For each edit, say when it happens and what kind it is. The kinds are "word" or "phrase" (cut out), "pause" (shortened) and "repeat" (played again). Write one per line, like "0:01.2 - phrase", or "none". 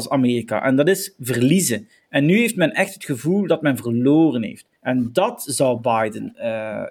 0:04.8 - pause

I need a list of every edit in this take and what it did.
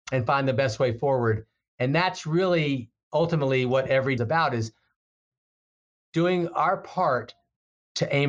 0:04.2 - phrase

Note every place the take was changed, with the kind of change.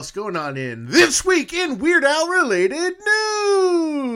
none

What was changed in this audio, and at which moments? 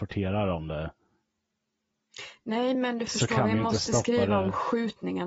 none

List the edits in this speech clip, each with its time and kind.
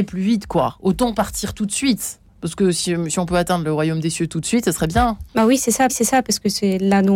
0:05.3 - pause
0:05.9 - repeat

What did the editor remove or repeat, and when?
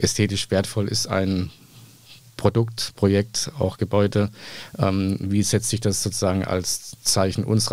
none

